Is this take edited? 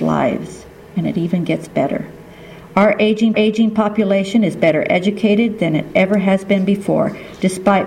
yes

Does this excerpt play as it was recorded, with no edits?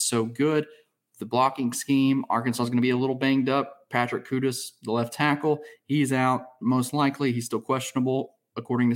yes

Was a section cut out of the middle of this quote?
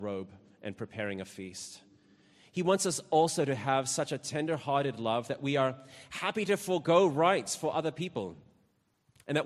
no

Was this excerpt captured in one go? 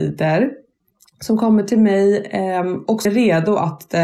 no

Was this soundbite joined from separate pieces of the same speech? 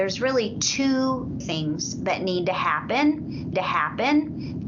yes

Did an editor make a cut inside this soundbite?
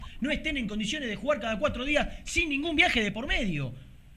no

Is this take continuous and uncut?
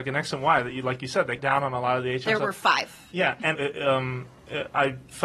no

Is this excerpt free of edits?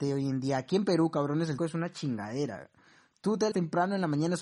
no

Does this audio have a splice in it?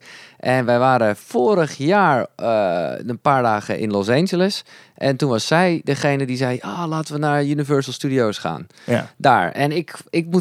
yes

